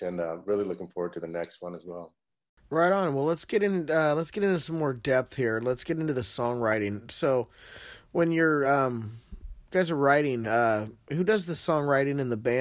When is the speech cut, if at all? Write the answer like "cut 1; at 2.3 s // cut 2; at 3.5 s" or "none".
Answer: none